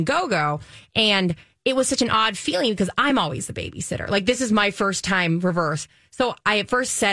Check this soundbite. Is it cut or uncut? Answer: uncut